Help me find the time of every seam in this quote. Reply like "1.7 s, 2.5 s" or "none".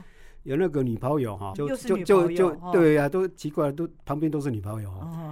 1.5 s